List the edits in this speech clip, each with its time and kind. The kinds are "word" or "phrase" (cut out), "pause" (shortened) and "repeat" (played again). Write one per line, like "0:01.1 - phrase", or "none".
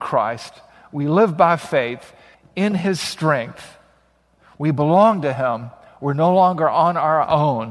0:02.3 - pause